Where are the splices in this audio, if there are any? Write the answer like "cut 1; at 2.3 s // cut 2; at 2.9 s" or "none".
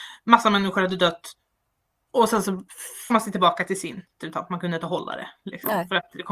cut 1; at 3.1 s // cut 2; at 4.2 s